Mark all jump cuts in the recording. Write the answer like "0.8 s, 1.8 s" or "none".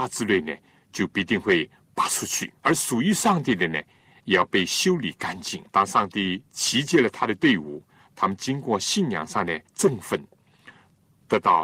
2.6 s, 5.7 s, 7.9 s, 9.7 s